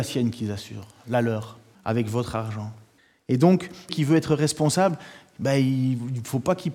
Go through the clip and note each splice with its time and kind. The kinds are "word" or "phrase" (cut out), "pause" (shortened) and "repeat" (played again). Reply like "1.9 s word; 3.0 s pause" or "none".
1.7 s pause; 3.0 s pause; 3.9 s word